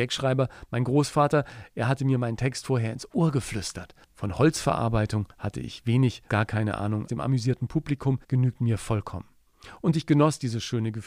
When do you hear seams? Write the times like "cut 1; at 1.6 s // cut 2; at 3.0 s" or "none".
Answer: cut 1; at 4.0 s // cut 2; at 5.3 s // cut 3; at 6.3 s // cut 4; at 7.1 s // cut 5; at 8.2 s